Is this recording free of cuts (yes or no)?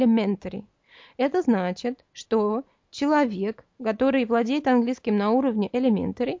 no